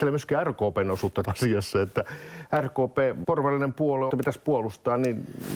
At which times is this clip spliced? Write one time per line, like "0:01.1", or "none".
0:01.2
0:03.2
0:04.1